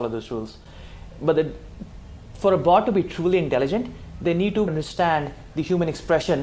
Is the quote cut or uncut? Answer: cut